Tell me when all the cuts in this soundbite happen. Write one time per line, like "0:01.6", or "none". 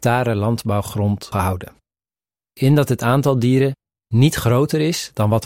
0:01.3
0:02.6